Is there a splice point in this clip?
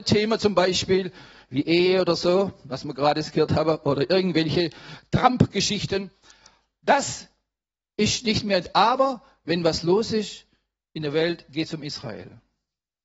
no; 0 cuts

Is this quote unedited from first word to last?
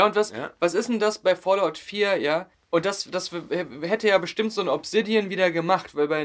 no; 1 cut; at 2.5 s

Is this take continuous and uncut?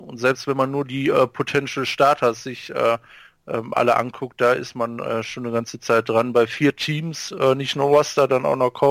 yes; 0 cuts

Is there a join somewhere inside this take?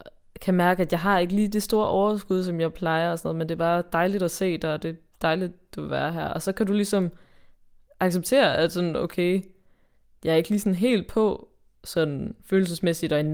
no; 0 cuts

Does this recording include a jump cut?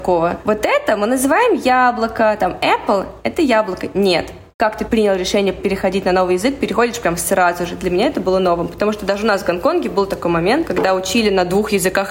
no; 0 cuts

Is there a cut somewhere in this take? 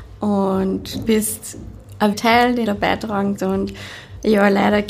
yes; 4 cuts; at 1.0 s, 2.1 s, 2.6 s, 3.3 s

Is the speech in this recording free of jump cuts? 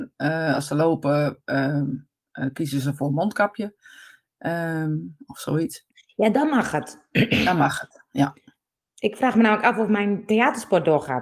yes; 0 cuts

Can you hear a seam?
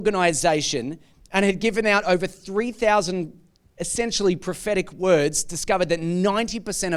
no; 0 cuts

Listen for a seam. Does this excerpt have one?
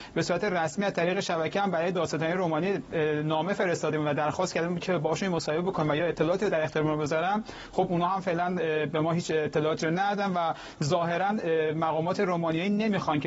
no; 0 cuts

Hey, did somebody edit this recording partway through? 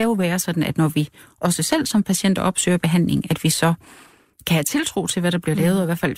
no; 0 cuts

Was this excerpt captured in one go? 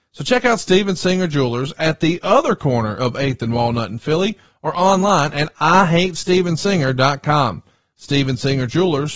yes; 0 cuts

